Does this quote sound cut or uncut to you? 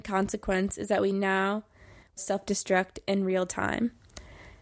cut